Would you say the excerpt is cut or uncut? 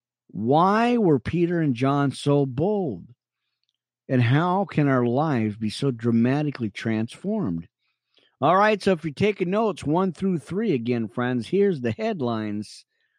uncut